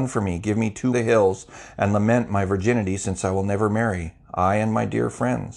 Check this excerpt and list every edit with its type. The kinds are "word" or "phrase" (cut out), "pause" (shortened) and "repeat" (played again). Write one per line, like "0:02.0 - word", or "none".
0:00.9 - phrase